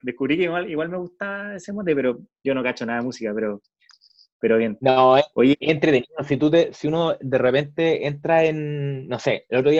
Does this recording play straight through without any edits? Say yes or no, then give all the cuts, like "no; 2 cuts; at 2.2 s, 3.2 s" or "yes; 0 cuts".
yes; 0 cuts